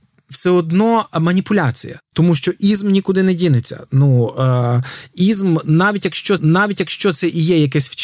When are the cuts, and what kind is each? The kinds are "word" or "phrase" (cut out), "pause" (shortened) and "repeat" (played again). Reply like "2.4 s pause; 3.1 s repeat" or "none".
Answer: 6.4 s repeat